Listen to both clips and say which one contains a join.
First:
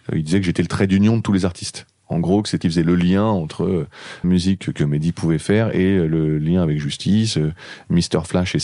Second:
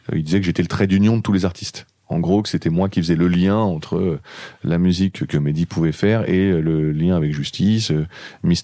first; 2 cuts; at 2.6 s, 4.2 s

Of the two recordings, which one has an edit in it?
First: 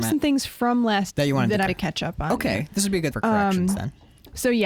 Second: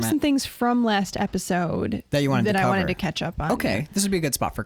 first; 3 cuts; at 1.1 s, 1.7 s, 3.1 s

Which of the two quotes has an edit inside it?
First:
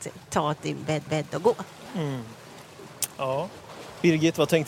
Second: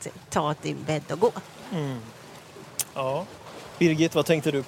first; 1 cut; at 1.1 s

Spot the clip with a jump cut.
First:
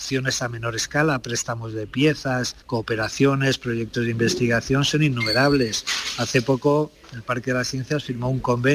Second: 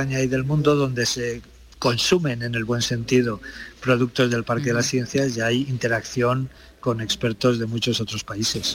first; 1 cut; at 2.6 s

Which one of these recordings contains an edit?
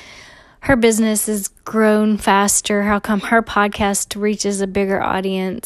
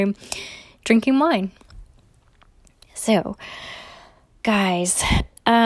second; 1 cut; at 4.4 s

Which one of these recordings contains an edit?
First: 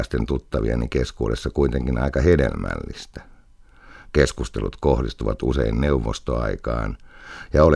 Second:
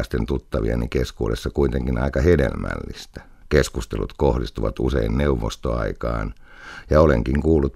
second; 1 cut; at 3.4 s

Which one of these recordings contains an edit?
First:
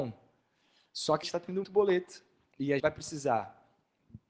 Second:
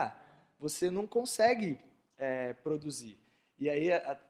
first; 3 cuts; at 1.2 s, 1.6 s, 2.8 s

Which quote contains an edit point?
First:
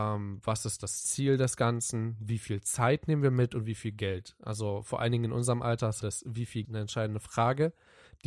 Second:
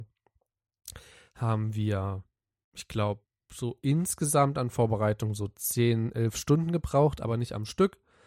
first; 2 cuts; at 6.0 s, 6.6 s

